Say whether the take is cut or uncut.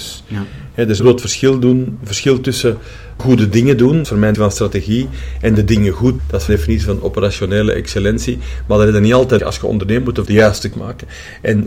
cut